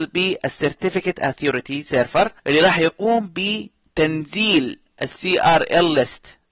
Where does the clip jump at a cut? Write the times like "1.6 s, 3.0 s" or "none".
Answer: 2.4 s

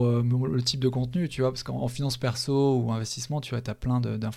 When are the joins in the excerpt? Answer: none

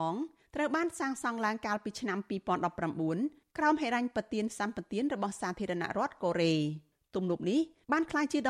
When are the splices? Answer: none

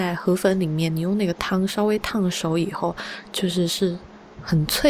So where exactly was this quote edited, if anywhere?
3.3 s

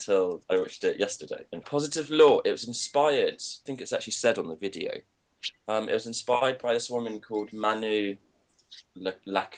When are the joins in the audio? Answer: 1.6 s, 3.7 s

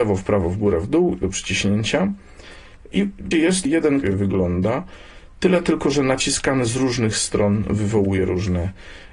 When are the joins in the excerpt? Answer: 1.2 s, 3.3 s, 3.7 s, 4.0 s

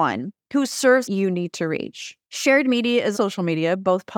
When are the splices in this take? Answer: 1.0 s, 2.2 s, 3.1 s

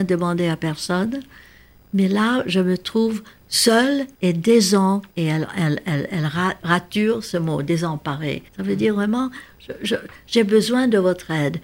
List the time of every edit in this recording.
4.1 s, 5.1 s, 8.5 s

